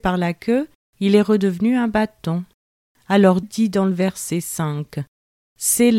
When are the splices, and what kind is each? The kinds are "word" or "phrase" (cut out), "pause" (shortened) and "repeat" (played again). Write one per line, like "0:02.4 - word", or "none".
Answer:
0:03.4 - word